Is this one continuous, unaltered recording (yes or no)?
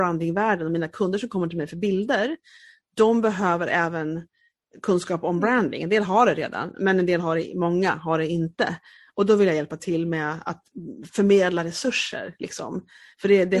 yes